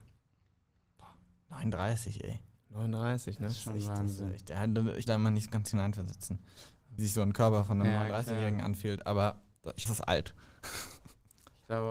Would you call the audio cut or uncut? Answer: cut